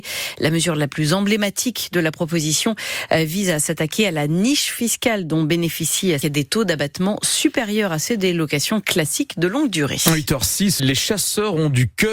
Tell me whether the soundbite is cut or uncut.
cut